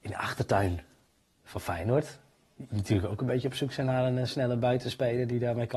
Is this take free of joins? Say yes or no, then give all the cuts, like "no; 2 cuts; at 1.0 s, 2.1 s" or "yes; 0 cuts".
yes; 0 cuts